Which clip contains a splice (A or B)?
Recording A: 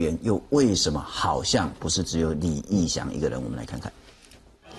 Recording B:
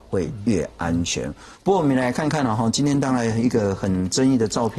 B